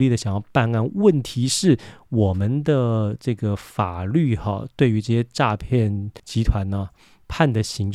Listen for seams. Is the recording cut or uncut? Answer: cut